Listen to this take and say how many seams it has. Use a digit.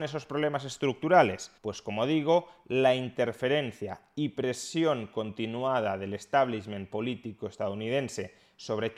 1